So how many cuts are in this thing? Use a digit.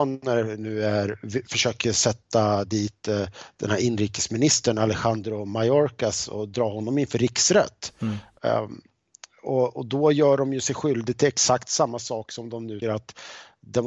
1